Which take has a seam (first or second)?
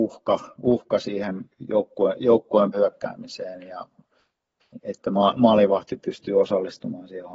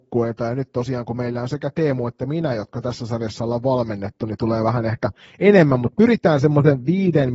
first